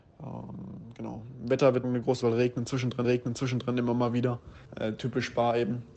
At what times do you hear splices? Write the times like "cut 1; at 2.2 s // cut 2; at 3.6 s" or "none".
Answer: cut 1; at 1.8 s // cut 2; at 2.2 s // cut 3; at 3.0 s // cut 4; at 4.6 s